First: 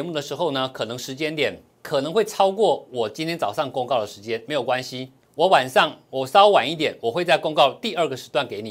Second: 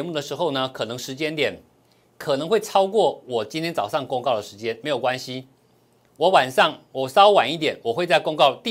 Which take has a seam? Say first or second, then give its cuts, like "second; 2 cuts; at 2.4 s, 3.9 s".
first; 2 cuts; at 1.7 s, 5.2 s